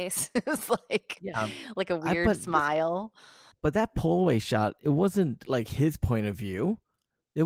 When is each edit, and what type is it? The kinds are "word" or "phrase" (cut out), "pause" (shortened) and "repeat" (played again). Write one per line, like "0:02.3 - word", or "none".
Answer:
0:03.5 - pause